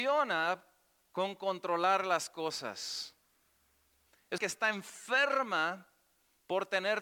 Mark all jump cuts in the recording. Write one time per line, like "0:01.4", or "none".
0:04.4